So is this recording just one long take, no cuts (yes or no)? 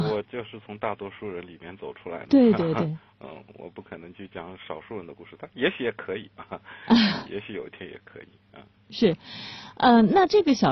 yes